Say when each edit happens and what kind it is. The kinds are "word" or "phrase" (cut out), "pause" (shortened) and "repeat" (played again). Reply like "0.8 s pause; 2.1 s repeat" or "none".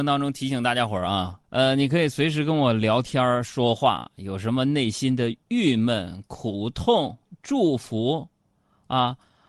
1.4 s pause